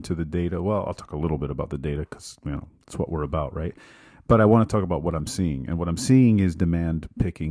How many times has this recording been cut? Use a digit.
0